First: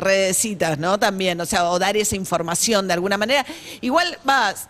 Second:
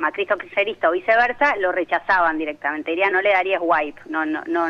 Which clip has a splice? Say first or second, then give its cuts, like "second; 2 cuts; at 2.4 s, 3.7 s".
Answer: second; 1 cut; at 3.1 s